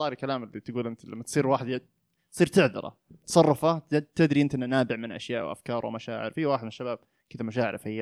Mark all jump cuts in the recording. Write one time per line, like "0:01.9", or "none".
none